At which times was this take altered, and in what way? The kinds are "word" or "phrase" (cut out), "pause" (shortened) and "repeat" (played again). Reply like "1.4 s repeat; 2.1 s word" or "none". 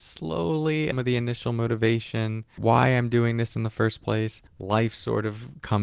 0.9 s phrase; 2.6 s word; 4.5 s pause